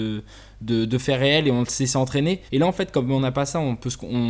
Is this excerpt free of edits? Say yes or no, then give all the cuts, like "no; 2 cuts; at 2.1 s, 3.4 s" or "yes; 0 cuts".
no; 1 cut; at 2.5 s